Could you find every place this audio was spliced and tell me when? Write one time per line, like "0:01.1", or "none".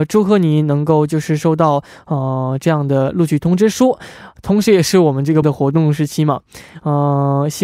0:05.4